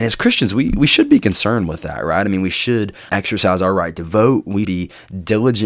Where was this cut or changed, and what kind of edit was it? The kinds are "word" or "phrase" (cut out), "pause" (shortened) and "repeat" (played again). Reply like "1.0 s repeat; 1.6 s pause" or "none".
3.1 s word; 4.6 s word